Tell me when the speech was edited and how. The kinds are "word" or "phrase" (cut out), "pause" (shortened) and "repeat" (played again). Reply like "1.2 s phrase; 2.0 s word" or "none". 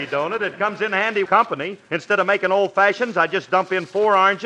1.3 s phrase; 1.8 s pause